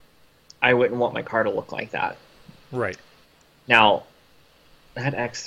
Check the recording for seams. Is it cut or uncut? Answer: uncut